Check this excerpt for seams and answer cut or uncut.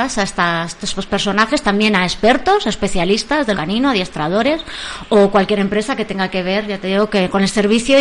cut